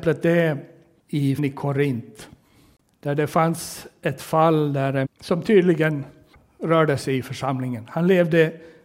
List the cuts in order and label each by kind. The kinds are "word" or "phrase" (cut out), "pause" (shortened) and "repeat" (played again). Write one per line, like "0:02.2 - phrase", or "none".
0:01.4 - word
0:05.0 - word

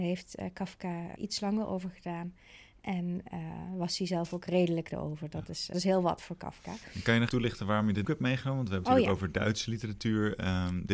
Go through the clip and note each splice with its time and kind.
0:01.2 - word
0:04.9 - word
0:05.7 - word
0:07.3 - word
0:08.0 - word
0:08.8 - word

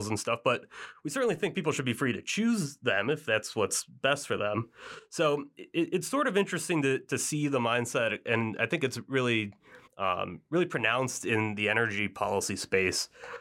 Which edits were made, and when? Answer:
0:05.6 - word
0:09.9 - pause

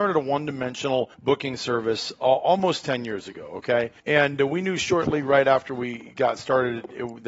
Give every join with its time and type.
0:01.1 - pause
0:04.0 - pause

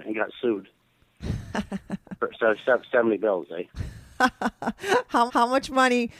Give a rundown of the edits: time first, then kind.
0:05.3 - repeat

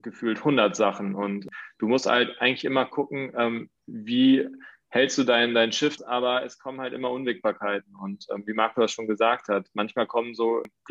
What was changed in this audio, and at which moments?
0:03.8 - pause
0:06.0 - phrase

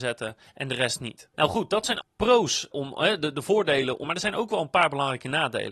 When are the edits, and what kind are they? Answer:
0:01.3 - pause
0:02.0 - word
0:02.7 - word
0:04.0 - phrase

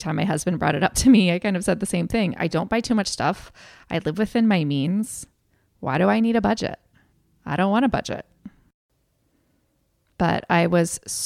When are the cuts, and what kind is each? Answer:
none

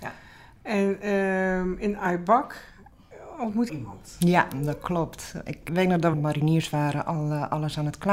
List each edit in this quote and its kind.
0:03.7 - phrase
0:05.7 - word
0:06.1 - phrase

